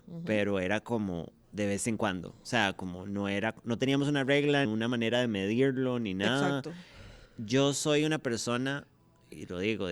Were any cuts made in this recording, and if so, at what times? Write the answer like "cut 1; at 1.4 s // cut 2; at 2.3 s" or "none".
cut 1; at 1.4 s // cut 2; at 4.6 s // cut 3; at 7.2 s